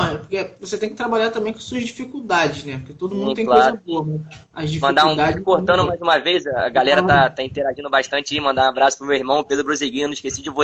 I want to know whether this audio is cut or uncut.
uncut